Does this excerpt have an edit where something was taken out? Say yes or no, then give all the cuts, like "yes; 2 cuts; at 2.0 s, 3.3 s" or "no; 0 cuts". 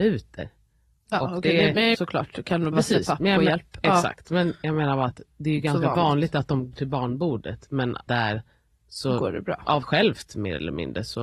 yes; 6 cuts; at 1.9 s, 2.7 s, 5.2 s, 6.7 s, 8.1 s, 9.8 s